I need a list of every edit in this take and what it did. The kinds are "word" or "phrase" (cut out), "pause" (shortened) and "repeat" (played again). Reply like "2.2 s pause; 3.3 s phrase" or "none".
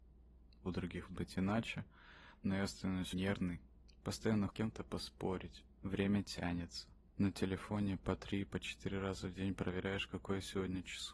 1.1 s word; 3.1 s word; 4.5 s phrase; 5.8 s pause